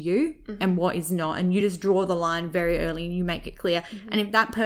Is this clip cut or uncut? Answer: uncut